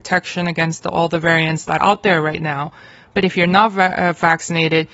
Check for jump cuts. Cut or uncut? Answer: cut